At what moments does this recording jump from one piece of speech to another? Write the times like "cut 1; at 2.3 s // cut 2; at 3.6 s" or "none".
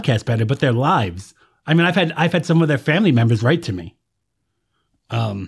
none